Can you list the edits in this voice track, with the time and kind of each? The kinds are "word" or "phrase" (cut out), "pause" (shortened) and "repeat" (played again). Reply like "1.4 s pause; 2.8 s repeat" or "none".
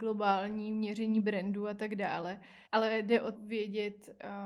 2.7 s pause; 3.3 s word

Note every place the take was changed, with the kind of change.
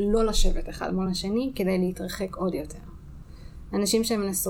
none

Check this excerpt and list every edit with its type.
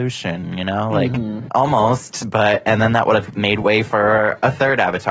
none

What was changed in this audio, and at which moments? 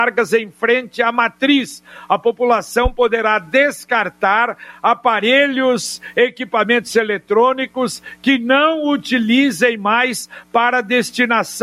none

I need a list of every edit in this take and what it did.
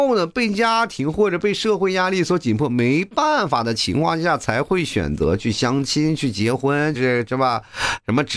6.9 s word

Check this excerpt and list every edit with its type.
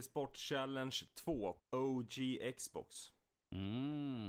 1.6 s word

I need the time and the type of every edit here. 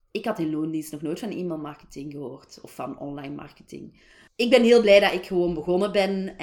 4.3 s pause

